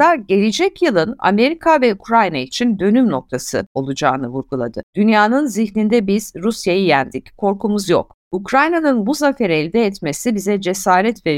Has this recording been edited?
no; 0 cuts

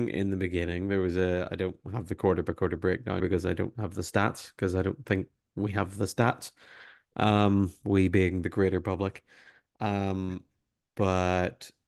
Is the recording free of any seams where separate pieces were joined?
no; 1 cut; at 3.2 s

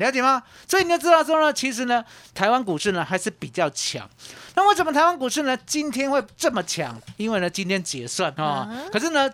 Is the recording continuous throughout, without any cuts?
no; 1 cut; at 8.4 s

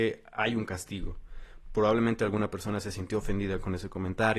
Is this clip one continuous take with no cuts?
no; 1 cut; at 1.6 s

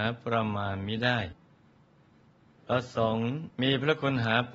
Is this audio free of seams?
no; 1 cut; at 3.5 s

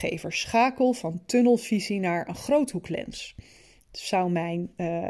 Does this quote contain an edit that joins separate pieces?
no; 0 cuts

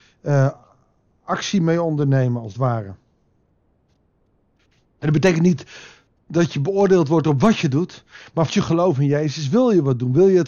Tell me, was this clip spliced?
yes; 1 cut; at 8.5 s

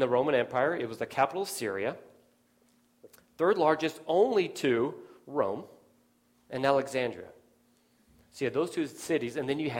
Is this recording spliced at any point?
no; 0 cuts

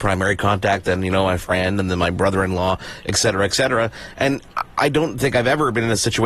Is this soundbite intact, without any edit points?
yes; 0 cuts

